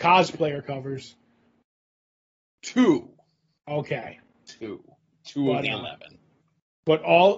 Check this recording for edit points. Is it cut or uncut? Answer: uncut